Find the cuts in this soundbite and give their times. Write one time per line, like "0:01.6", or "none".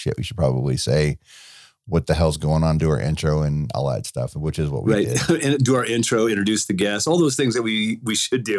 none